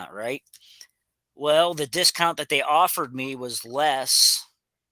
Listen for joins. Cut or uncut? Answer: uncut